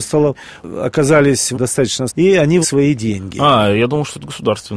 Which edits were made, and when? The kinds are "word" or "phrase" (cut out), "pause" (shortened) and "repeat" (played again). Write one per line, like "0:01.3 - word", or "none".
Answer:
0:01.5 - word
0:02.1 - word
0:02.6 - word